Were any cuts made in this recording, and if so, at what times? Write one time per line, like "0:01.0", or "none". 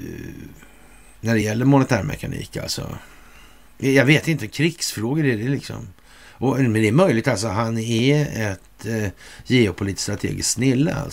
none